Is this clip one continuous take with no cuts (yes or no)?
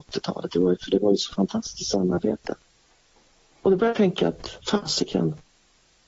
no